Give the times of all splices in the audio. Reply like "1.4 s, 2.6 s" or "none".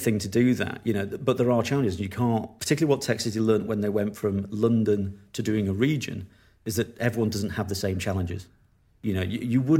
none

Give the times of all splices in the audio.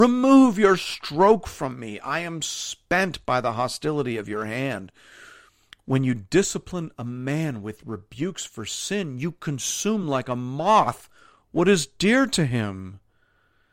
none

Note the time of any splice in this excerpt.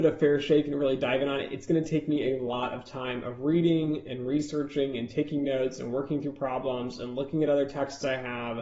none

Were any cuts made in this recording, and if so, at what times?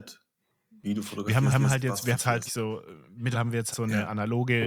1.5 s, 2.1 s, 2.5 s, 3.3 s, 3.7 s

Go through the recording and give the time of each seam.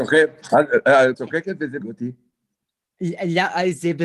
1.1 s, 1.8 s

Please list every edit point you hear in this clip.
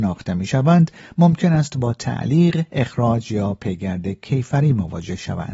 none

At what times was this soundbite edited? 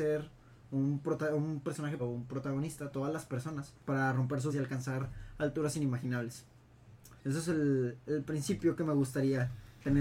2.0 s, 3.8 s, 4.5 s, 7.2 s

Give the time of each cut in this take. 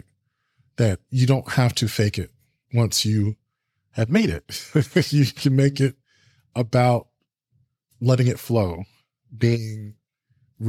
none

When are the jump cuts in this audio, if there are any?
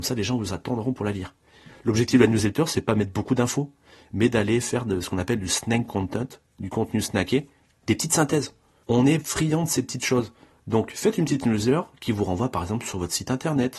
none

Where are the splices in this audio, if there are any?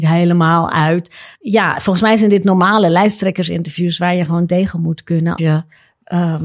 1.3 s, 5.4 s

